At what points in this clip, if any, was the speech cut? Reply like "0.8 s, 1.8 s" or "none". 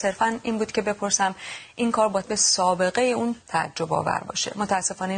2.2 s, 3.4 s